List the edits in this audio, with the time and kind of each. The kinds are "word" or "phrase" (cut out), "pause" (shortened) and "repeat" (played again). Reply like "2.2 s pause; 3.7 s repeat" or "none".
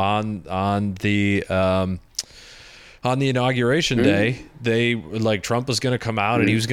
none